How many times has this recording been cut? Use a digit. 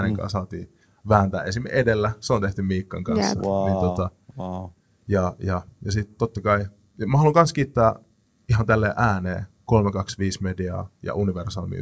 0